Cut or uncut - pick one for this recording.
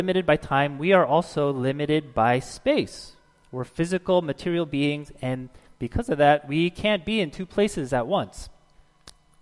uncut